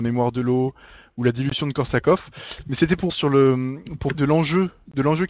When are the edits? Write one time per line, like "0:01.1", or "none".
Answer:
0:03.1
0:04.1